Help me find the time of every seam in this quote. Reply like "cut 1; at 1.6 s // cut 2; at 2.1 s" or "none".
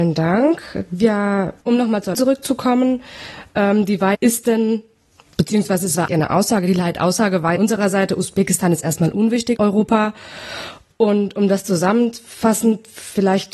cut 1; at 1.6 s // cut 2; at 2.1 s // cut 3; at 4.1 s // cut 4; at 6.1 s // cut 5; at 7.6 s // cut 6; at 9.6 s